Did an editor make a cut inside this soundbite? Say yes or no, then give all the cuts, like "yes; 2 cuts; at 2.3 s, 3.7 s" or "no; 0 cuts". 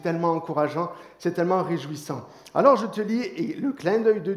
no; 0 cuts